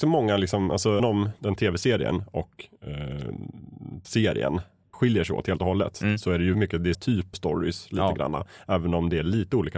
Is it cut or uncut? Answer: cut